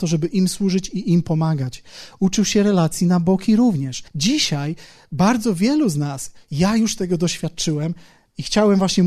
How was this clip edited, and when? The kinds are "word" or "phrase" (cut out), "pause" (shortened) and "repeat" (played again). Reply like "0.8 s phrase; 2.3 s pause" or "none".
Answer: 4.1 s pause